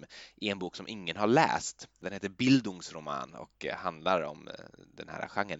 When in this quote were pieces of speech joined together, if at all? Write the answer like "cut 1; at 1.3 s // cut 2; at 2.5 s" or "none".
none